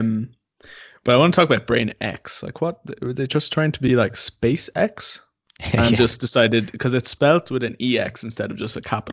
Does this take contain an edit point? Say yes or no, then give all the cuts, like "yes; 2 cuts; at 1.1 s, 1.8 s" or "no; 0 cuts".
no; 0 cuts